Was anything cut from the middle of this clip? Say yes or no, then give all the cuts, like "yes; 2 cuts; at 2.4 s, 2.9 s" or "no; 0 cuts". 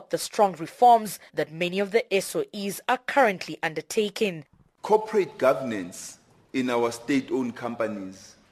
yes; 1 cut; at 1.3 s